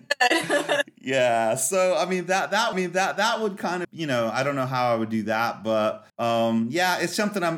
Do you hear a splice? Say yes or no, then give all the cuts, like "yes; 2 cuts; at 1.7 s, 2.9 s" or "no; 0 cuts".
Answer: yes; 3 cuts; at 2.7 s, 3.8 s, 6.1 s